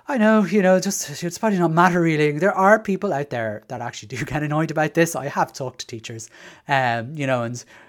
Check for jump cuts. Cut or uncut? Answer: uncut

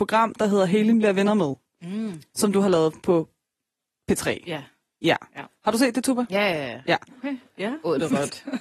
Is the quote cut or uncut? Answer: uncut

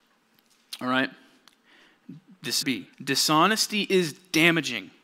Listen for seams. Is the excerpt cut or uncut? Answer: cut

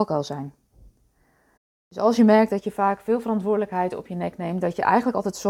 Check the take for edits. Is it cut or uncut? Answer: uncut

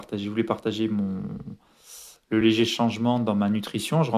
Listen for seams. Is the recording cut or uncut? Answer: uncut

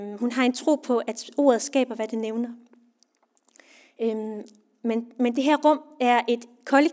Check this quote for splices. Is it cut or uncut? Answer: uncut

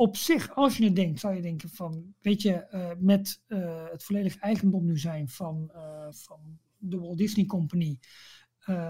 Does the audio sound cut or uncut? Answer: cut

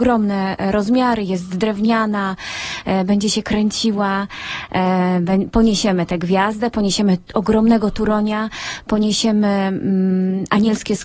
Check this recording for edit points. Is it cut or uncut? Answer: uncut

